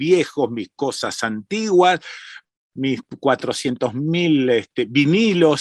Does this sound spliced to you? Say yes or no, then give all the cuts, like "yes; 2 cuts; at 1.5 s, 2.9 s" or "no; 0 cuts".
no; 0 cuts